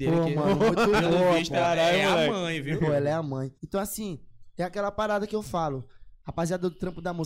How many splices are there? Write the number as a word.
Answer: one